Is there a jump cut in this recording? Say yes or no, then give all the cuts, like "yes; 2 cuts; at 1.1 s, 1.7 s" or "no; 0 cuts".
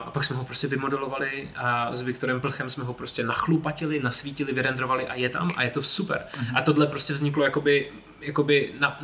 no; 0 cuts